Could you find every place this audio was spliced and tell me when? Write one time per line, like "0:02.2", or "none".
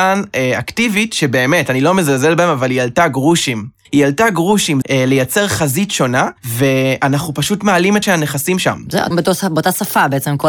0:03.8
0:04.8
0:06.4
0:08.0
0:08.6
0:09.1

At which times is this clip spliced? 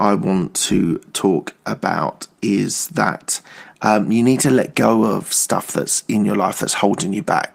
none

